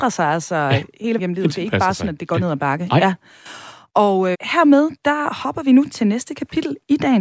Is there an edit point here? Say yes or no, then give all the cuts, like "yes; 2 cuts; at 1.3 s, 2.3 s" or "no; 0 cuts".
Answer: yes; 2 cuts; at 1.2 s, 4.3 s